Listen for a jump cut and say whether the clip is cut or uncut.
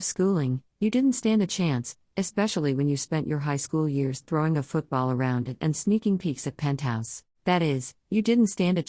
cut